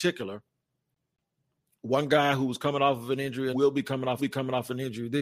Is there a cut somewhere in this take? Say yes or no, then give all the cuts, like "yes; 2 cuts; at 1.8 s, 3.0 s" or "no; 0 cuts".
yes; 2 cuts; at 3.5 s, 4.2 s